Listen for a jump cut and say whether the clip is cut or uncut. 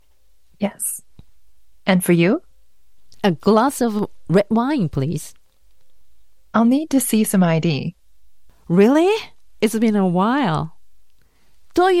uncut